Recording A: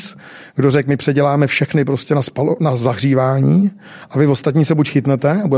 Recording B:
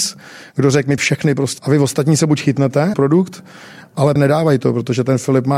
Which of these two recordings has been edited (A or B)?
B